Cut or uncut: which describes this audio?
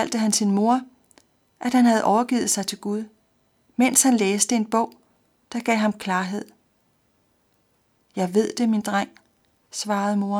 uncut